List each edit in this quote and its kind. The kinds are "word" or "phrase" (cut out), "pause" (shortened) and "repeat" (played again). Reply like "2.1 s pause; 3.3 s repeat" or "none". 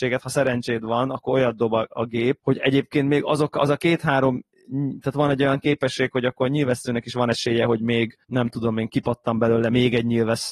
2.4 s word; 8.2 s pause

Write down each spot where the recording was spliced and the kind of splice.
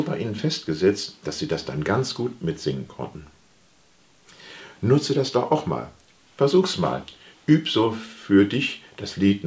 none

